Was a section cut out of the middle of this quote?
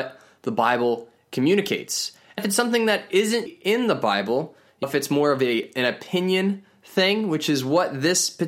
yes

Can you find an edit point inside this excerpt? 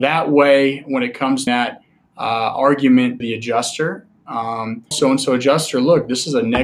yes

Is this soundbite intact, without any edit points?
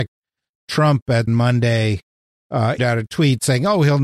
no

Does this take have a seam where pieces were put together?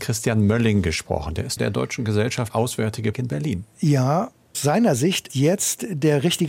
yes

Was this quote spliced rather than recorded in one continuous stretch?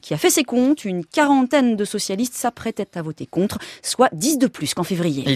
no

